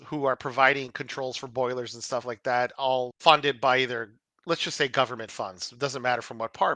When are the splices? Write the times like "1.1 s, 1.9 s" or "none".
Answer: none